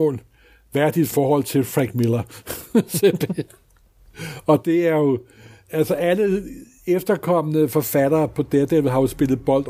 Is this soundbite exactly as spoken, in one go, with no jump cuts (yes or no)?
yes